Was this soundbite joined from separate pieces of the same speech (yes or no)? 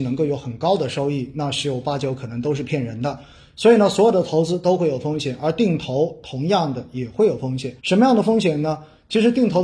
yes